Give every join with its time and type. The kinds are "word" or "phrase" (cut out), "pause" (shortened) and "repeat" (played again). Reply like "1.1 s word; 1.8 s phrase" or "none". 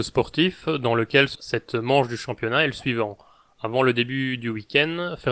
1.3 s word